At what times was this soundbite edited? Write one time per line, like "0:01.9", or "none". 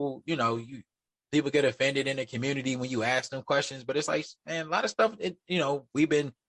none